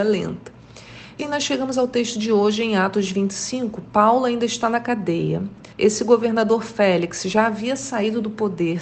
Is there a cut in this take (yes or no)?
yes